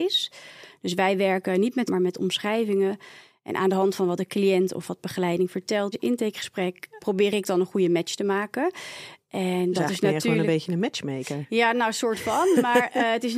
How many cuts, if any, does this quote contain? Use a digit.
3